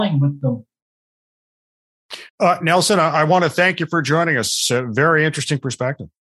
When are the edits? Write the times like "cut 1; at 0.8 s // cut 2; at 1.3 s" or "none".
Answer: cut 1; at 2.3 s